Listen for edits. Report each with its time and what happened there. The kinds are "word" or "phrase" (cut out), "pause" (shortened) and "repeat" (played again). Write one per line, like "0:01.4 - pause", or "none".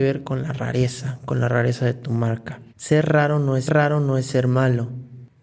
0:02.7 - pause
0:03.7 - repeat